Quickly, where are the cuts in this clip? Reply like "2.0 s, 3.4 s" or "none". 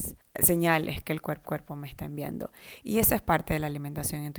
1.4 s